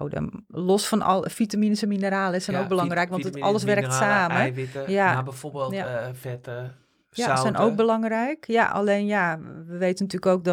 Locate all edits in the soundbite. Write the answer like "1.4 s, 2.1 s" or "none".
none